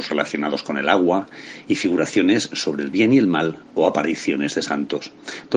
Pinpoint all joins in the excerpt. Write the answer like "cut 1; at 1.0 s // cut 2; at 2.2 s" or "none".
cut 1; at 3.6 s